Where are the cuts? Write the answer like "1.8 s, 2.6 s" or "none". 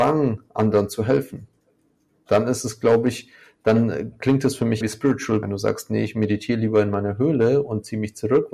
4.8 s, 5.4 s

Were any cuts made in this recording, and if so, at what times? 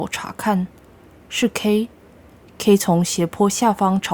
none

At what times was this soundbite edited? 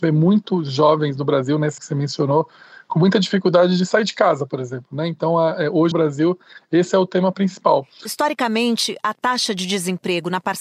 1.8 s, 5.9 s

